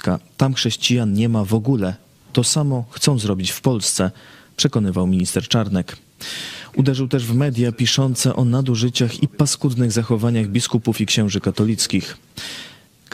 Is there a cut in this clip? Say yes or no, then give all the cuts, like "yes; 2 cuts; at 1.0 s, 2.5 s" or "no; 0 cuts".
no; 0 cuts